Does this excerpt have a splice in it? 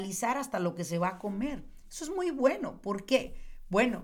no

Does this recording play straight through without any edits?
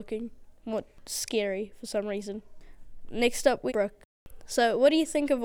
no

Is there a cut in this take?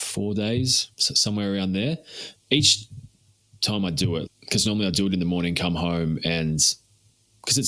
yes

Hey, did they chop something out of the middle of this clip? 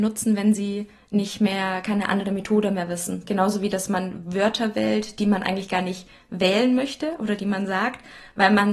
no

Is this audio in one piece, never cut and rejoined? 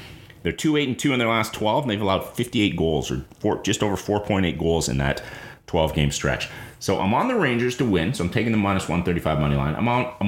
yes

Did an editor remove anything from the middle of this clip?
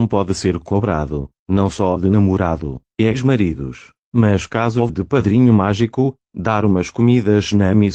yes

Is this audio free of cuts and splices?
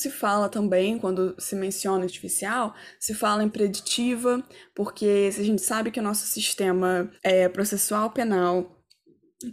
no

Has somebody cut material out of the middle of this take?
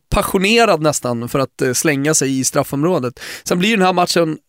no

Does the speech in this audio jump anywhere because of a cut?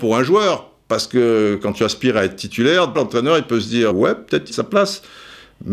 yes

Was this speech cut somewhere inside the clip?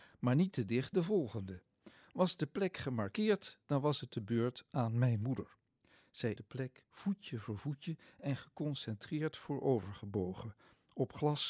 yes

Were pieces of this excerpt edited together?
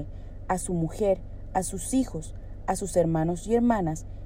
no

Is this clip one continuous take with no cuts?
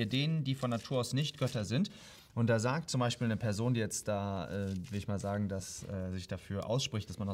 yes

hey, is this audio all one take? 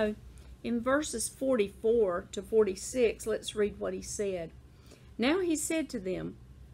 yes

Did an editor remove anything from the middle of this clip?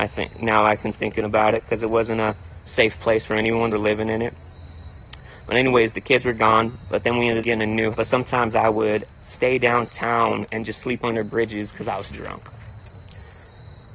yes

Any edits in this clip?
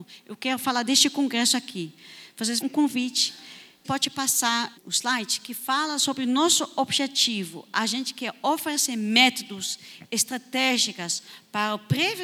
yes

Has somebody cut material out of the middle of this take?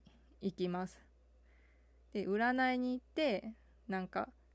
no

